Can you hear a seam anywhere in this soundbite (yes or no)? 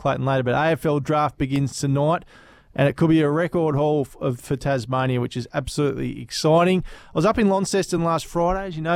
no